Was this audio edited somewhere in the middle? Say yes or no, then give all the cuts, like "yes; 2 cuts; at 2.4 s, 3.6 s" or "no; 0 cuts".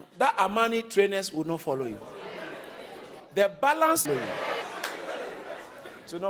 yes; 1 cut; at 4.0 s